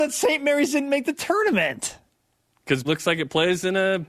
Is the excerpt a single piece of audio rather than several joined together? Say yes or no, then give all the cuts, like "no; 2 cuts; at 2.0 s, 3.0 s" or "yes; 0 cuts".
no; 1 cut; at 2.8 s